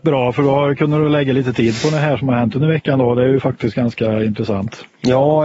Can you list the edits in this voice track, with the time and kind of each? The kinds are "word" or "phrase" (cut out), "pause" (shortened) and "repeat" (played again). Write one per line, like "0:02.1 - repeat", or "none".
none